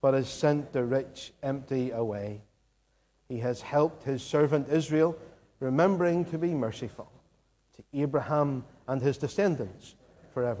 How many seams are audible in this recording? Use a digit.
0